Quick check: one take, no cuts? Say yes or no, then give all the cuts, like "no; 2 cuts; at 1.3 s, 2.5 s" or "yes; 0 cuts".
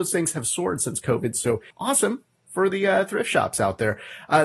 no; 1 cut; at 1.7 s